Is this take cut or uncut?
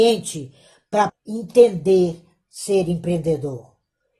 cut